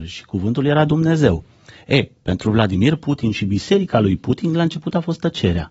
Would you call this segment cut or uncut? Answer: uncut